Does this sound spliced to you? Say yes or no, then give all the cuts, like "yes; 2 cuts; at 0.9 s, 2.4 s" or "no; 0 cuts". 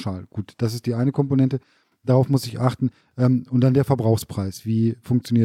no; 0 cuts